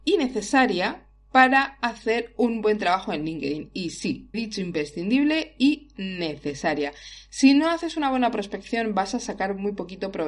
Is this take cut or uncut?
cut